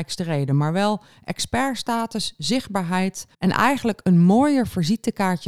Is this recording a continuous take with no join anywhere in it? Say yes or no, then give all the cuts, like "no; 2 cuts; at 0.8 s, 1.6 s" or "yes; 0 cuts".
no; 1 cut; at 3.3 s